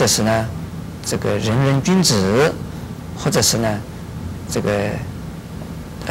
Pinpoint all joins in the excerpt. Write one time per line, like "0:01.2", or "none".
0:03.1